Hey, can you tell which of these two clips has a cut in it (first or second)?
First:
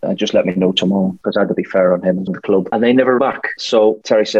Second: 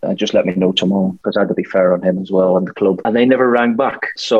first